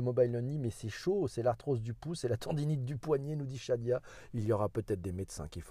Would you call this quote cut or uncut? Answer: uncut